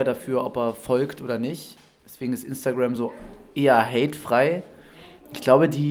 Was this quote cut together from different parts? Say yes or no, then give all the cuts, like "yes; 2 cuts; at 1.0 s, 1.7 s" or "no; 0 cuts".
no; 0 cuts